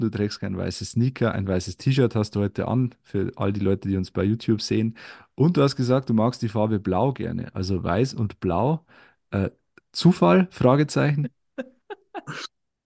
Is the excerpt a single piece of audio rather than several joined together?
yes; 0 cuts

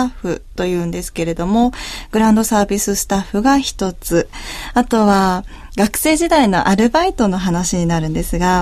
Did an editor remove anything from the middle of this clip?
no; 0 cuts

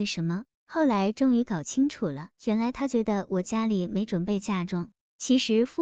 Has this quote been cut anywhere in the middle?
yes; 1 cut; at 2.3 s

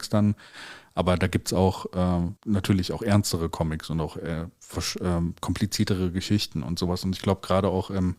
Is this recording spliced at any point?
yes; 1 cut; at 2.4 s

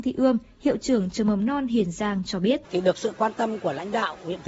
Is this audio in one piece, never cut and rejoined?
no; 1 cut; at 2.6 s

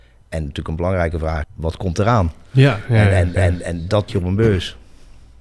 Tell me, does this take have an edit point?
yes; 3 cuts; at 1.4 s, 3.4 s, 4.1 s

